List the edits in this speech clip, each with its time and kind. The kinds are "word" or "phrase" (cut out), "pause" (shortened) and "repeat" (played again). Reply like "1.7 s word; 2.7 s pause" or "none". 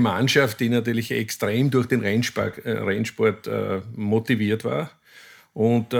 none